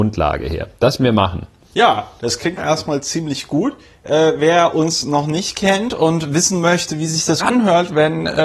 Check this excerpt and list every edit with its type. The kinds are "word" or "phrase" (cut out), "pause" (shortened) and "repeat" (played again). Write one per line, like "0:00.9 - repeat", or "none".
0:01.0 - word
0:02.6 - word
0:07.4 - word